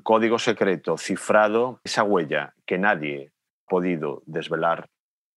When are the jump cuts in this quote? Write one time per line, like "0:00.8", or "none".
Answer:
0:01.9
0:03.7